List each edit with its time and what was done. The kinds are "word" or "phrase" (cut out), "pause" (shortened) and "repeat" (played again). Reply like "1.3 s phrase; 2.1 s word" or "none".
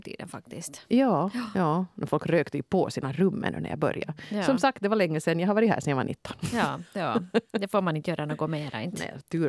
none